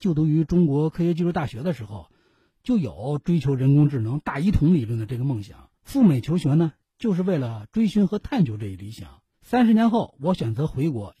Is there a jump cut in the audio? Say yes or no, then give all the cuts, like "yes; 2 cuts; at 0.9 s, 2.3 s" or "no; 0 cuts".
yes; 1 cut; at 5.8 s